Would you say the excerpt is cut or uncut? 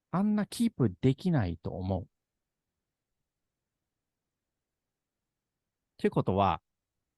uncut